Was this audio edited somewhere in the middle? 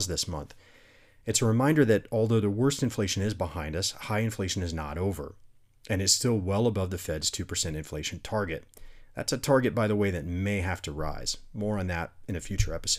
no; 0 cuts

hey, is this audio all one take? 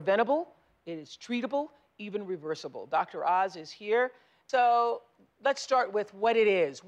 yes; 0 cuts

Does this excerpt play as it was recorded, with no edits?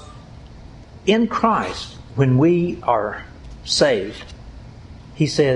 yes; 0 cuts

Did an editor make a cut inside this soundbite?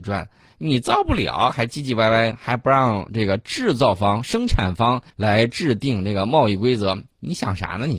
yes; 1 cut; at 5.1 s

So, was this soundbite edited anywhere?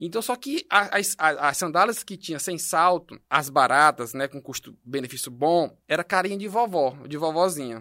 yes; 2 cuts; at 3.3 s, 5.8 s

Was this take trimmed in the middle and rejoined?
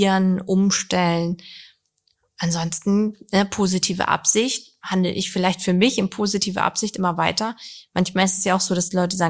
no; 0 cuts

